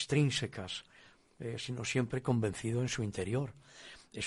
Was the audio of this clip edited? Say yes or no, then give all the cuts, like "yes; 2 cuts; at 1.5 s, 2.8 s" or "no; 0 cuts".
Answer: no; 0 cuts